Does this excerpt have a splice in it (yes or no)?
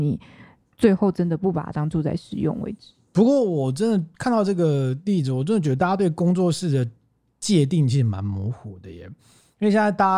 no